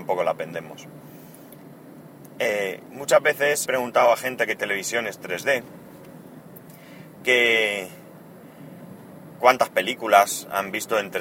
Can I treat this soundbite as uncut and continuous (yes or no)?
no